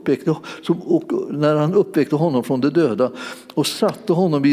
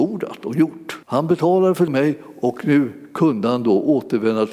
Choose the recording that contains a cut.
second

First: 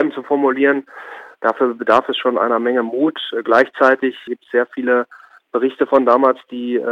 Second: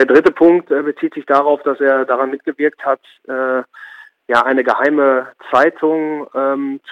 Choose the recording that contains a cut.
first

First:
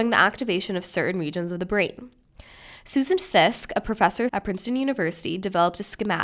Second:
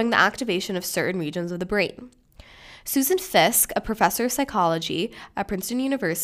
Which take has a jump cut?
first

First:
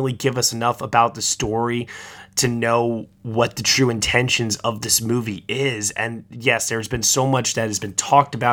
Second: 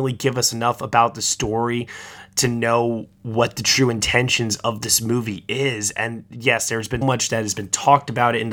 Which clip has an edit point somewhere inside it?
second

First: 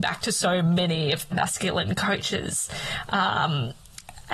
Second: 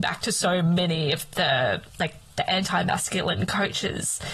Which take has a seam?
first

